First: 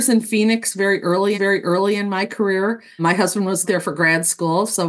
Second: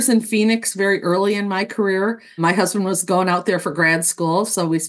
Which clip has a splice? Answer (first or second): first